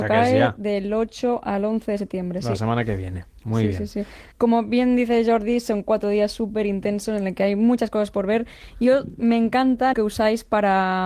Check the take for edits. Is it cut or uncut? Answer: cut